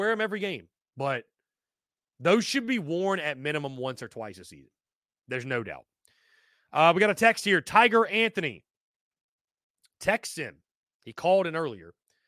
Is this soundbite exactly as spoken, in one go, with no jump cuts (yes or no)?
yes